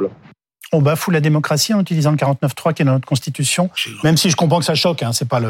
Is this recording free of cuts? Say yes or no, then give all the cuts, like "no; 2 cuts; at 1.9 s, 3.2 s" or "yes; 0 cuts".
yes; 0 cuts